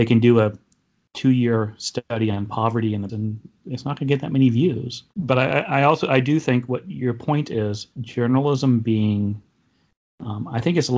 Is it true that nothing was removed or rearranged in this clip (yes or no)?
no